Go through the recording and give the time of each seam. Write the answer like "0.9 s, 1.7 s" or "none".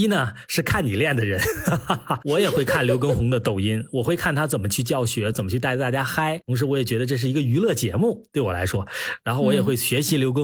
5.3 s

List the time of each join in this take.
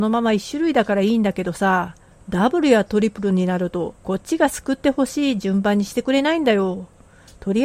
2.1 s, 4.0 s

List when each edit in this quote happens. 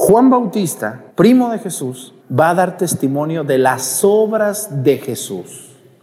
1.1 s, 2.2 s

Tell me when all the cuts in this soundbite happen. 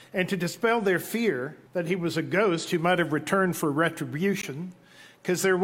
1.7 s

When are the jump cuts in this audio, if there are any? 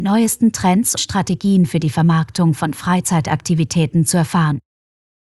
1.0 s

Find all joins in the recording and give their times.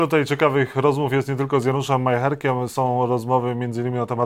none

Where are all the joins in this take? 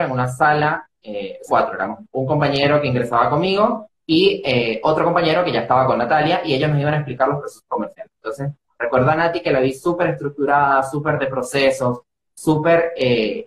1.5 s, 4.0 s

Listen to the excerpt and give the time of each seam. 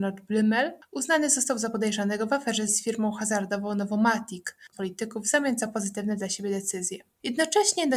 2.7 s, 4.7 s

